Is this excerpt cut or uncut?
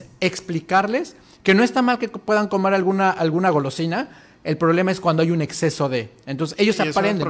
uncut